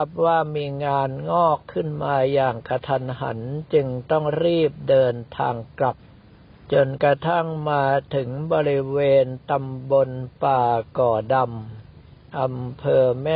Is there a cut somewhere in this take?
no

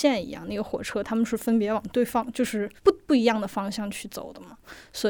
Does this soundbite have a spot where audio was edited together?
yes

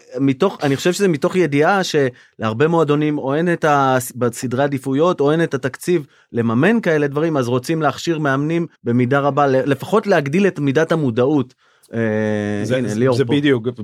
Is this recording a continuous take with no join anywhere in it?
no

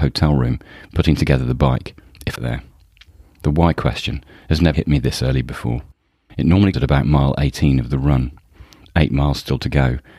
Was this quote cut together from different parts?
yes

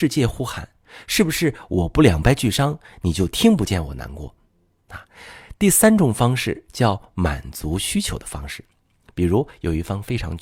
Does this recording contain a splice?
yes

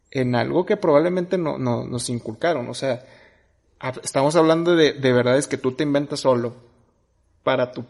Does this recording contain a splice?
no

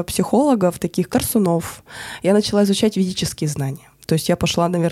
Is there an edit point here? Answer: yes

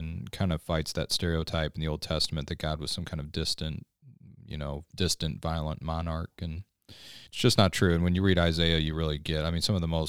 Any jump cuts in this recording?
yes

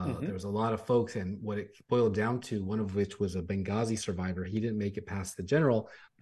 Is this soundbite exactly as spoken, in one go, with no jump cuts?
yes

